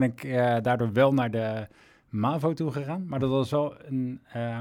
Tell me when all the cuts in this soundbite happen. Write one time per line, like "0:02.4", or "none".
none